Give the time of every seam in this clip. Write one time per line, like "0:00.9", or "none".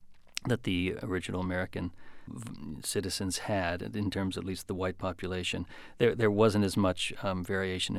0:02.3